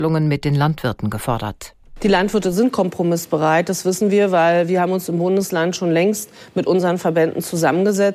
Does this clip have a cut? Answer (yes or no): no